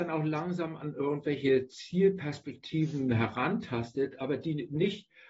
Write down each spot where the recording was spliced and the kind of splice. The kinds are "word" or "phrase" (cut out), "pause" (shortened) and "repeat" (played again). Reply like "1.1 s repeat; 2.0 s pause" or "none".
none

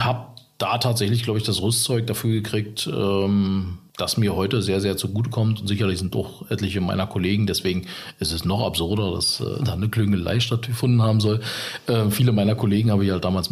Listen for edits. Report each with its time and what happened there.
none

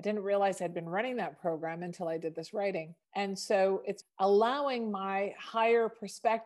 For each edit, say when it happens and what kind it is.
3.0 s pause; 4.0 s word

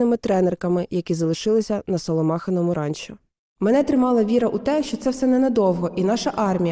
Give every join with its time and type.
none

